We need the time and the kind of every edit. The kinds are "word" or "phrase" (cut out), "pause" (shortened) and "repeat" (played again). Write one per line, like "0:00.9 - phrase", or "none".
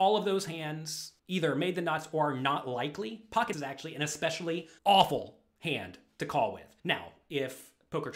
0:01.2 - pause
0:03.5 - word
0:04.8 - pause
0:06.8 - pause